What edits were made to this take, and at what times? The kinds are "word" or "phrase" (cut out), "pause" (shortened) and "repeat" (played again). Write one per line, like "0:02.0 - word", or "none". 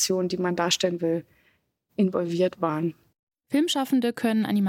none